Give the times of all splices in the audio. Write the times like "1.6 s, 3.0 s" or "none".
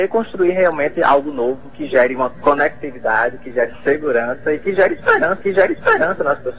5.4 s